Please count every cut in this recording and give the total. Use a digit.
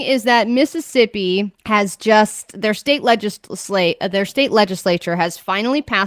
1